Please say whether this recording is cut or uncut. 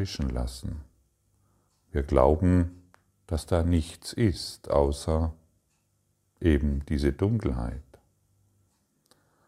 uncut